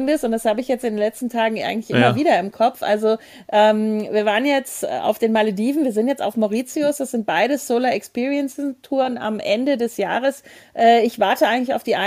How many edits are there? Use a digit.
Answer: 0